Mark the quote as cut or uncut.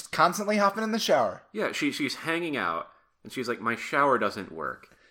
uncut